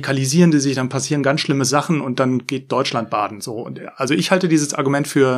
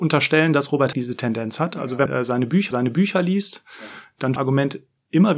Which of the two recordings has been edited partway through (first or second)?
second